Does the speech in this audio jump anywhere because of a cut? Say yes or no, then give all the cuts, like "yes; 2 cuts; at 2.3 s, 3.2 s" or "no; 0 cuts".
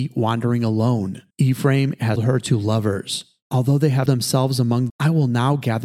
yes; 4 cuts; at 1.3 s, 2.2 s, 4.1 s, 4.9 s